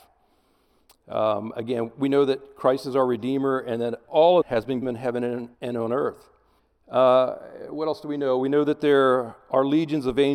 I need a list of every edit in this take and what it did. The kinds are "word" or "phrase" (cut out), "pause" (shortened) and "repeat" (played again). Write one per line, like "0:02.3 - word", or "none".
0:04.4 - word
0:04.8 - phrase
0:05.5 - pause
0:06.6 - pause